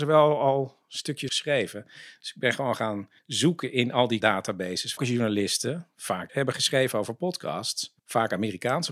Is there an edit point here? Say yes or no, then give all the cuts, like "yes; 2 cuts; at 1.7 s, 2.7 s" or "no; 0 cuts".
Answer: yes; 6 cuts; at 1.3 s, 3.2 s, 4.2 s, 5.0 s, 6.3 s, 8.0 s